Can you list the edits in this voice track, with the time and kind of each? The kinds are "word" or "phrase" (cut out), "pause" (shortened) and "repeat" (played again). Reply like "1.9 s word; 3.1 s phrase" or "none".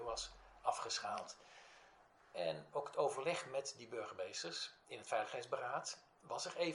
2.7 s word

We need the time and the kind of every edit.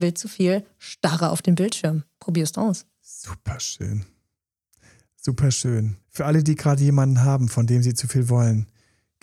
2.1 s pause; 2.6 s word; 6.0 s pause

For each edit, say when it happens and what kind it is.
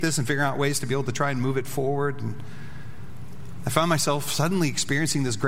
none

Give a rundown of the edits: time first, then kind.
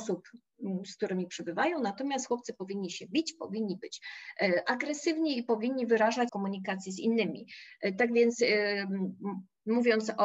6.3 s phrase

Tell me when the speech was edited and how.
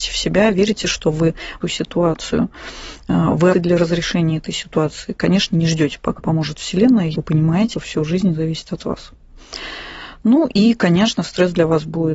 1.6 s phrase; 3.5 s phrase; 6.2 s word; 7.1 s word; 7.7 s word

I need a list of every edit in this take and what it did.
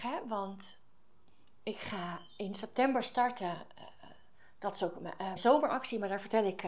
5.4 s word

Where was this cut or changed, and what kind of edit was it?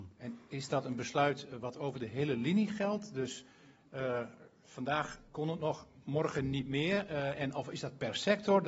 5.3 s pause

